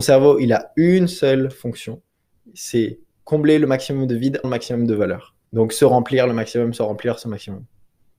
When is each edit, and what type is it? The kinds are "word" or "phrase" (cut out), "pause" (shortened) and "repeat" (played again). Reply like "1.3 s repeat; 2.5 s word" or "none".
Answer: 4.4 s phrase; 5.5 s pause